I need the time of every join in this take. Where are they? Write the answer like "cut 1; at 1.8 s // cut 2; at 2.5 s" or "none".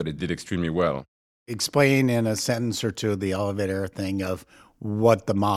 none